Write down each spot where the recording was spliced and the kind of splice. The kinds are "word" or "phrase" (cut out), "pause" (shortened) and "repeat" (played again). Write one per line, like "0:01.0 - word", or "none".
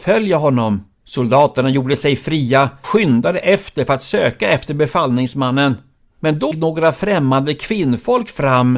0:00.9 - pause
0:02.8 - word
0:06.5 - word

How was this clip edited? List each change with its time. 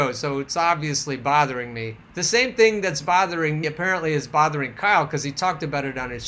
0:02.0 - pause
0:03.6 - word

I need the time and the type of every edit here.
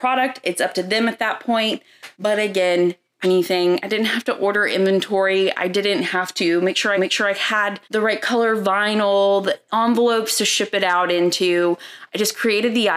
0:02.1 - pause
0:03.2 - phrase
0:07.0 - repeat
0:07.8 - pause

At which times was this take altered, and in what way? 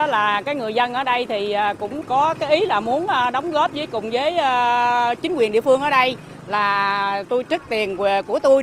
0:02.0 - word

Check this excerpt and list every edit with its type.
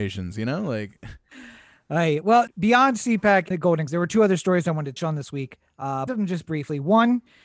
0:02.5 - word
0:03.5 - word
0:03.9 - word
0:05.0 - word
0:06.1 - word

